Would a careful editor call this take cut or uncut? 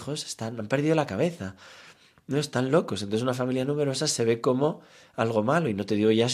uncut